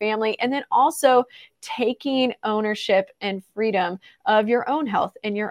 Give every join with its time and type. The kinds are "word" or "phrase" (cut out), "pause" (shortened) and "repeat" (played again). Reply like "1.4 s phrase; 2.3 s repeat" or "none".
none